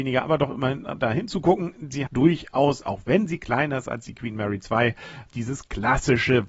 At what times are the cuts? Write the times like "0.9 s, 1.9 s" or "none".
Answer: 2.1 s, 5.3 s